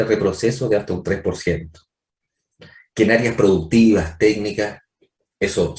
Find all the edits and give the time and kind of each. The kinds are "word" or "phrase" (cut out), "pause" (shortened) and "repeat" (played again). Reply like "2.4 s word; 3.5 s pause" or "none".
none